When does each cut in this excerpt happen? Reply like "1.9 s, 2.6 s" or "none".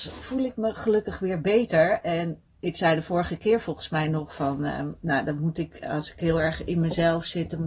none